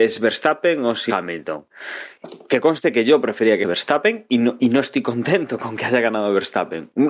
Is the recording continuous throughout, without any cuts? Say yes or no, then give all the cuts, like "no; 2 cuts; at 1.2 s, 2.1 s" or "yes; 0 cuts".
no; 2 cuts; at 1.1 s, 3.6 s